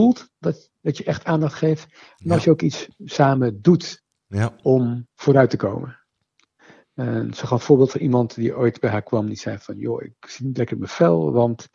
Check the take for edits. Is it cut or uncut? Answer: uncut